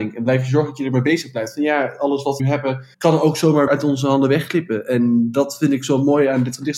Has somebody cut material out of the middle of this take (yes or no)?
yes